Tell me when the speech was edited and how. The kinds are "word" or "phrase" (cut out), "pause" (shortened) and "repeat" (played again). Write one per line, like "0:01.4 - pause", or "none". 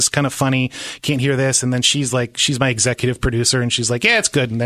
none